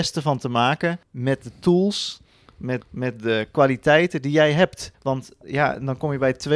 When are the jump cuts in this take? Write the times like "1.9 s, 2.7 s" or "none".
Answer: 1.0 s, 2.8 s, 4.9 s